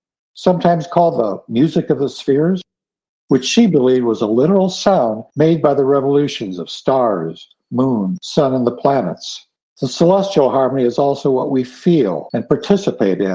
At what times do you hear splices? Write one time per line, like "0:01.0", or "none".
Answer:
none